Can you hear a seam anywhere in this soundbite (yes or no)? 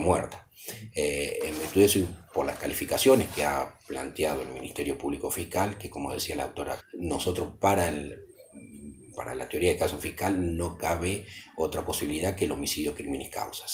yes